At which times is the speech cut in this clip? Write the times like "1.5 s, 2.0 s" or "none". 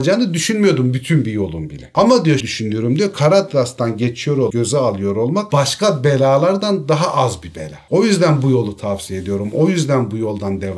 2.4 s, 4.5 s